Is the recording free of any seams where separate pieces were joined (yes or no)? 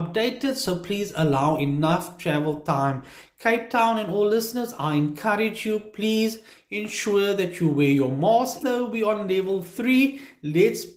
no